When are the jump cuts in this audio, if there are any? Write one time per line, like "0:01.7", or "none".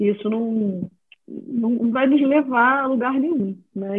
0:01.0